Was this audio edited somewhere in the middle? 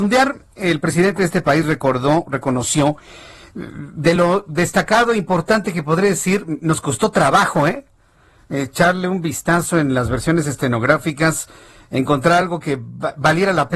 no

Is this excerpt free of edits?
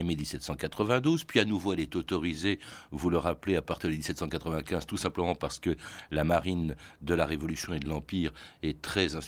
yes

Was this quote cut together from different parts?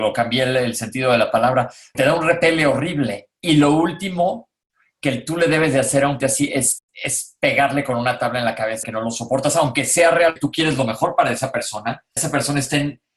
yes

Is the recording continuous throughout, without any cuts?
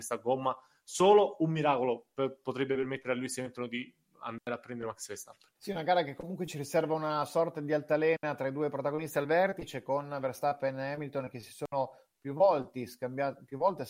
no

